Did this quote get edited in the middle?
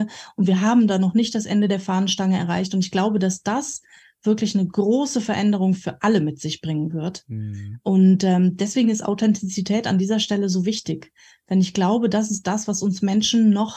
no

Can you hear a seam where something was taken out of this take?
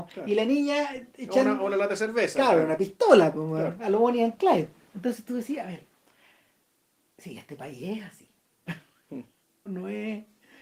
yes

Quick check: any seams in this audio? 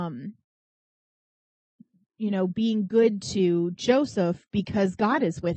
no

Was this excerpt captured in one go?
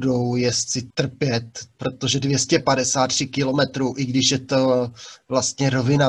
no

